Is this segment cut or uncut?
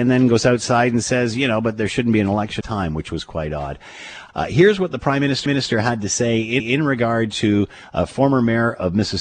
cut